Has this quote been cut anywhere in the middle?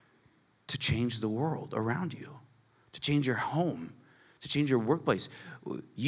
no; 0 cuts

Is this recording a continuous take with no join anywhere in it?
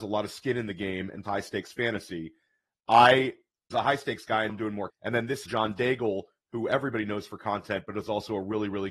no; 5 cuts; at 1.2 s, 3.7 s, 4.5 s, 4.9 s, 5.5 s

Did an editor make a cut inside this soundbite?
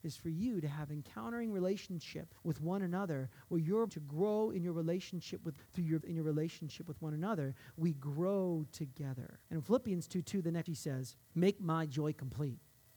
yes; 7 cuts; at 2.4 s, 3.9 s, 5.6 s, 6.0 s, 9.4 s, 10.7 s, 11.2 s

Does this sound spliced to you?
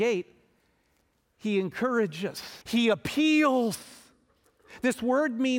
yes; 1 cut; at 2.6 s

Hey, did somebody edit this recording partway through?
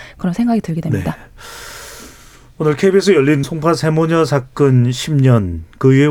yes; 1 cut; at 3.4 s

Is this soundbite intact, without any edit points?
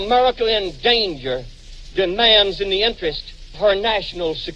no; 1 cut; at 3.5 s

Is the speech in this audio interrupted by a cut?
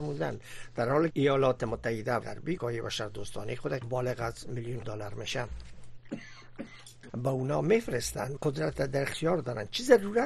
yes; 7 cuts; at 1.1 s, 2.2 s, 2.6 s, 3.8 s, 4.8 s, 7.1 s, 8.4 s

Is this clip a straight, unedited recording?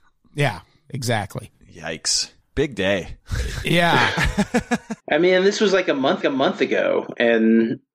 no; 3 cuts; at 3.2 s, 5.0 s, 6.2 s

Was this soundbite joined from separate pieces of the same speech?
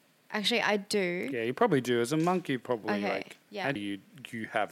yes; 2 cuts; at 3.4 s, 3.8 s

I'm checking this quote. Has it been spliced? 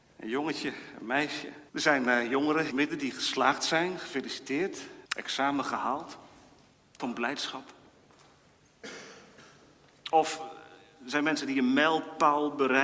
yes; 4 cuts; at 1.7 s, 2.7 s, 5.1 s, 7.0 s

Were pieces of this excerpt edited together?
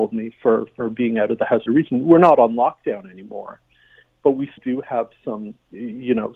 yes; 2 cuts; at 1.7 s, 4.6 s

